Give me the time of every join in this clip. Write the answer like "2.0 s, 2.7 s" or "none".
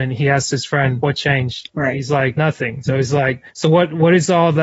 3.5 s